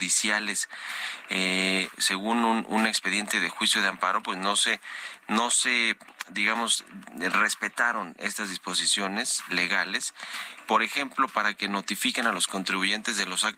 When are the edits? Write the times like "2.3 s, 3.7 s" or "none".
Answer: none

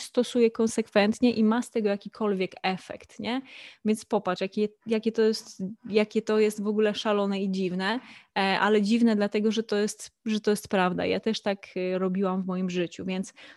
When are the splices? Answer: none

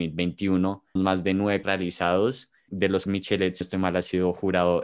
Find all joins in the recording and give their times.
1.0 s, 1.6 s, 2.7 s, 3.1 s, 3.6 s

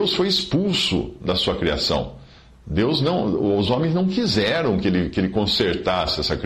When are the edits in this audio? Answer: none

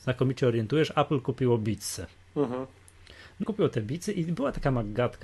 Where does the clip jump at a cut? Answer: 3.4 s

